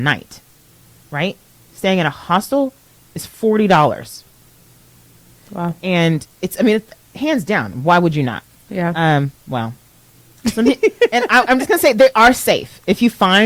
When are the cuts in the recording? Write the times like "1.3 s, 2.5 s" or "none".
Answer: none